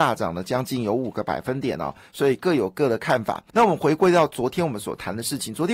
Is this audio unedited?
no; 1 cut; at 3.5 s

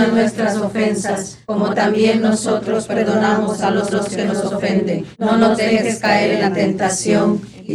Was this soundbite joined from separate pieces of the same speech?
yes; 3 cuts; at 1.4 s, 3.9 s, 5.1 s

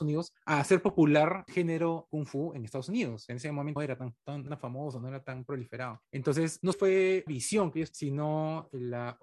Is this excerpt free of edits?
no; 7 cuts; at 1.5 s, 2.1 s, 3.8 s, 4.5 s, 6.7 s, 7.3 s, 7.9 s

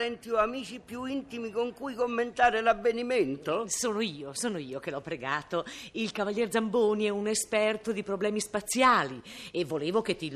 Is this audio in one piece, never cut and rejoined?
yes; 0 cuts

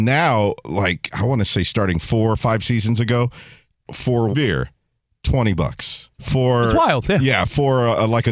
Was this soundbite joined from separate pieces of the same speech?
yes; 2 cuts; at 4.3 s, 6.1 s

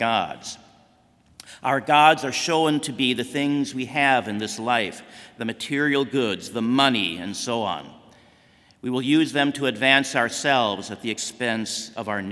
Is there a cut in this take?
no; 0 cuts

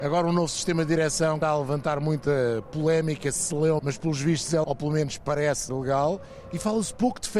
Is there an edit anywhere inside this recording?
yes; 4 cuts; at 1.4 s, 3.8 s, 4.6 s, 5.7 s

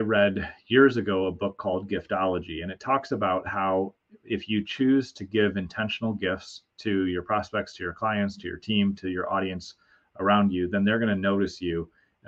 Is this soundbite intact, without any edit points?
yes; 0 cuts

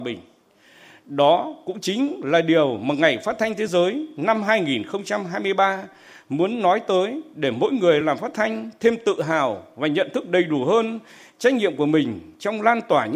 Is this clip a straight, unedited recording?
yes; 0 cuts

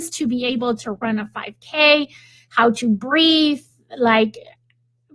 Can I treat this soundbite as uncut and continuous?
yes; 0 cuts

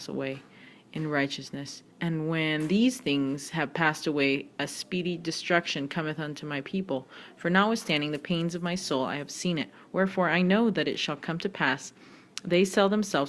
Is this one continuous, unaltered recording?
no; 1 cut; at 1.9 s

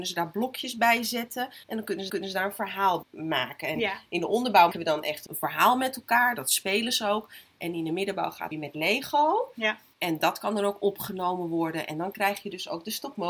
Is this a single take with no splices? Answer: no; 7 cuts; at 1.6 s, 2.1 s, 3.0 s, 4.7 s, 5.3 s, 8.5 s, 9.9 s

